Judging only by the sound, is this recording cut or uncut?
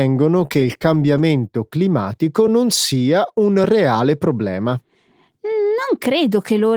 uncut